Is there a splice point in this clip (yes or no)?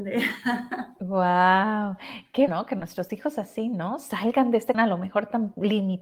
yes